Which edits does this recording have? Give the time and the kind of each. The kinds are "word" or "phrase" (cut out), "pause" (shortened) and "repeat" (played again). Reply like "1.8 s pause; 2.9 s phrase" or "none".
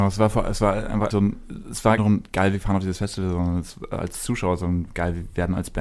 1.1 s word; 2.0 s phrase